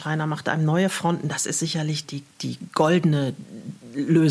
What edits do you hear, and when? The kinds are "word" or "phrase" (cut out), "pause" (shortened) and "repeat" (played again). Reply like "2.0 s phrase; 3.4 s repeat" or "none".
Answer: 2.0 s word